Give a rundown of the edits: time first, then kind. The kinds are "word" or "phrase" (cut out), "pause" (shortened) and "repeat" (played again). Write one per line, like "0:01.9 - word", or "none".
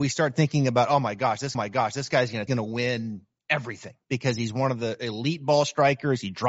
0:01.5 - repeat
0:02.5 - phrase
0:04.0 - pause